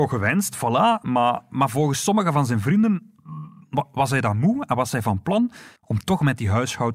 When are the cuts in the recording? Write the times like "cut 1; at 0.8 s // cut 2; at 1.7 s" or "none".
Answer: cut 1; at 5.8 s